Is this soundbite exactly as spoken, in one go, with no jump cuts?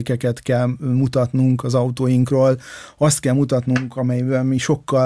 yes; 0 cuts

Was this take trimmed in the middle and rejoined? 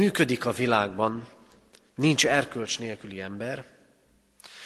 no; 0 cuts

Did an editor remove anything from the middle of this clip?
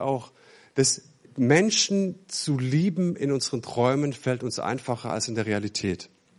no; 0 cuts

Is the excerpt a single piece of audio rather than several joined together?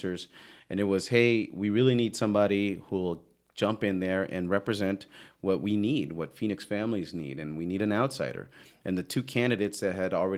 yes; 0 cuts

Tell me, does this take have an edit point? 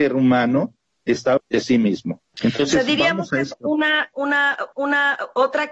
yes; 3 cuts; at 1.4 s, 3.5 s, 4.7 s

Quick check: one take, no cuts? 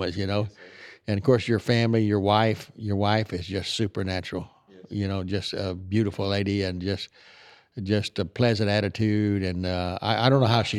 yes; 0 cuts

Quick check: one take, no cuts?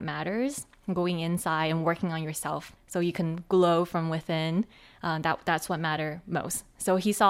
no; 1 cut; at 2.8 s

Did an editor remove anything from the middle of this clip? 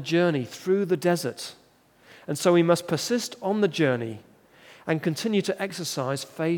no; 0 cuts

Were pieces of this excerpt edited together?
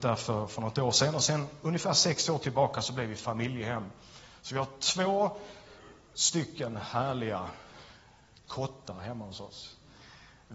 no; 0 cuts

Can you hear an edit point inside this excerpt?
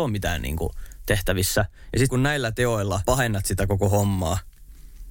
yes; 2 cuts; at 2.1 s, 3.1 s

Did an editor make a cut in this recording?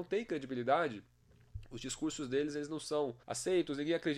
yes; 1 cut; at 3.2 s

